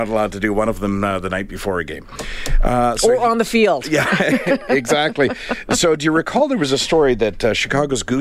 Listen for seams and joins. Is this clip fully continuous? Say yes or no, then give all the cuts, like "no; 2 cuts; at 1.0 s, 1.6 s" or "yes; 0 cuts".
yes; 0 cuts